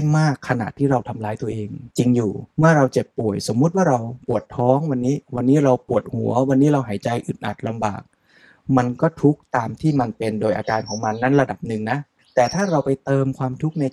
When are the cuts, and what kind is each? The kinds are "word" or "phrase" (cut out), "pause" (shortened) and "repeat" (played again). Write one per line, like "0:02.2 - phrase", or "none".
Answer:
0:01.9 - pause
0:02.5 - pause
0:04.2 - pause
0:05.2 - pause
0:12.2 - pause